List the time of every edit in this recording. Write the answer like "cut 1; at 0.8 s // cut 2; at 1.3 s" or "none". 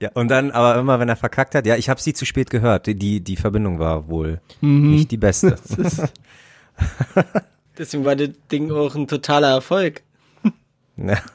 none